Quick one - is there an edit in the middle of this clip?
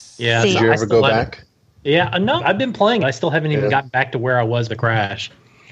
yes; 3 cuts; at 2.4 s, 3.0 s, 4.7 s

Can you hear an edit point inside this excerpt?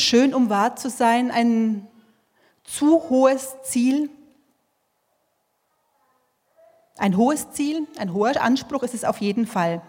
no; 0 cuts

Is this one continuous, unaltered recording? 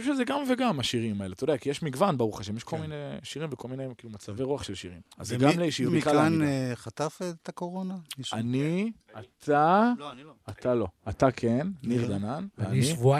no; 5 cuts; at 3.6 s, 5.1 s, 5.9 s, 9.0 s, 10.4 s

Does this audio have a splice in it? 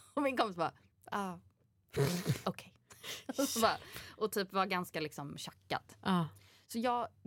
yes; 1 cut; at 0.9 s

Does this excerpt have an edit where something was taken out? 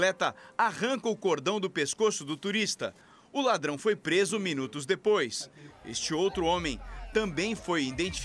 no; 0 cuts

